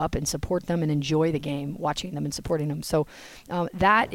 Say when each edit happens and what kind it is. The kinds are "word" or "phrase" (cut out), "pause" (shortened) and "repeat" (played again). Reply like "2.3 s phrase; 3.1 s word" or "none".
none

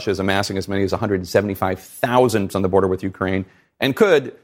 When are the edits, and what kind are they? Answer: 2.5 s word

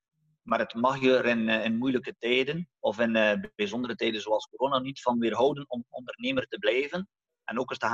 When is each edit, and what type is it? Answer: 2.8 s pause; 3.5 s pause

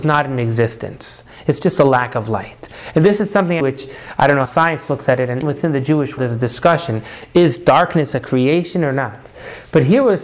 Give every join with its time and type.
3.6 s word; 4.5 s word; 5.4 s word; 6.2 s word

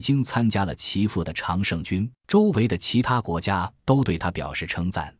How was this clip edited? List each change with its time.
2.2 s pause

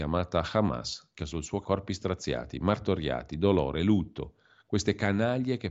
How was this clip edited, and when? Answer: 1.2 s word; 1.6 s word

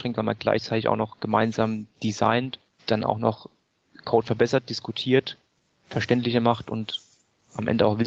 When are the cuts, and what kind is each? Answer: 2.8 s word

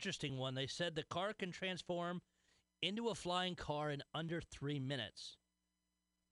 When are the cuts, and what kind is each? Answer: none

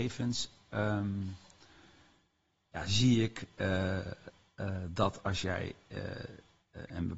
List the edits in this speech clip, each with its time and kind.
none

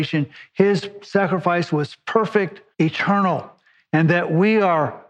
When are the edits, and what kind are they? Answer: 2.7 s pause

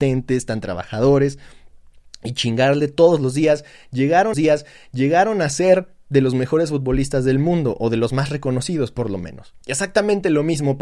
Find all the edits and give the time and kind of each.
4.3 s repeat; 9.6 s pause

